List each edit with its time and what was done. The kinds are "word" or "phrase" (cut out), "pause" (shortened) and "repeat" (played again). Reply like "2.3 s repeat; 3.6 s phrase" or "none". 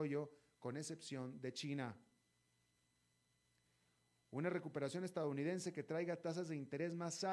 none